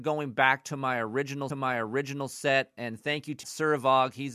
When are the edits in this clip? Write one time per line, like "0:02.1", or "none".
0:01.5
0:03.4